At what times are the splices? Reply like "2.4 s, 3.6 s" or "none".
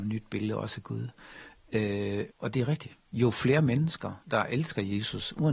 2.3 s, 3.0 s, 4.2 s